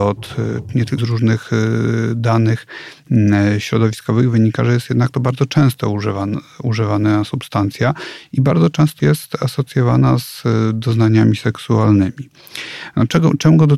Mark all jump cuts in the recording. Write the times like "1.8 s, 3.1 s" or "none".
1.0 s, 9.0 s